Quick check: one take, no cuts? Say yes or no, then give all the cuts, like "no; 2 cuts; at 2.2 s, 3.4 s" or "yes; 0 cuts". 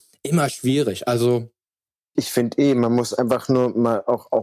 yes; 0 cuts